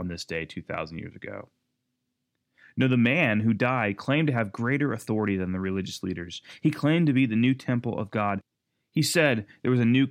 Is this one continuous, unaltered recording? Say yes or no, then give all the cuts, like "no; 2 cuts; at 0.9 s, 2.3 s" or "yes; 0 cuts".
yes; 0 cuts